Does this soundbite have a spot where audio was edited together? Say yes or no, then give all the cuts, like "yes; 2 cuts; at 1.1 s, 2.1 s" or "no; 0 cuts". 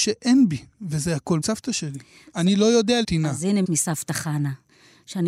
yes; 3 cuts; at 1.4 s, 3.0 s, 3.6 s